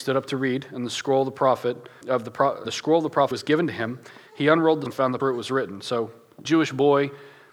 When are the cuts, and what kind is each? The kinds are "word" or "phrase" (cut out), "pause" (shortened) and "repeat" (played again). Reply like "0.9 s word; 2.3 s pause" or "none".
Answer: 2.0 s word; 2.6 s word; 3.3 s word; 4.9 s word; 5.2 s word; 6.4 s word